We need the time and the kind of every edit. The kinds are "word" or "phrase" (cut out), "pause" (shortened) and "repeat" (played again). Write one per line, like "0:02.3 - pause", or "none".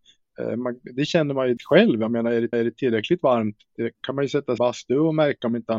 0:01.6 - word
0:02.5 - repeat
0:03.9 - pause
0:04.6 - phrase